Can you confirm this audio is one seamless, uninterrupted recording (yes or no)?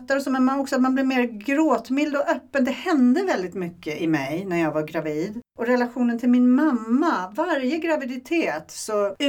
no